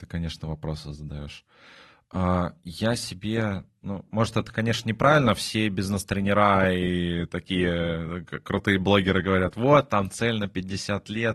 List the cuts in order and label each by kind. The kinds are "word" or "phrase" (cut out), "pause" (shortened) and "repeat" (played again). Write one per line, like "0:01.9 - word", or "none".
none